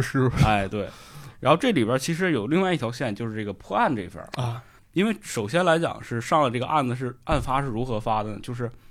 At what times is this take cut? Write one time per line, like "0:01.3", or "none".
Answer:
0:04.8